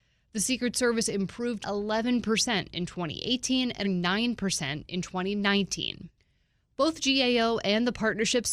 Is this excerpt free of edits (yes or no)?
no